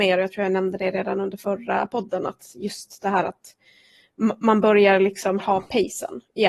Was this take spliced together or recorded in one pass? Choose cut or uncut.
cut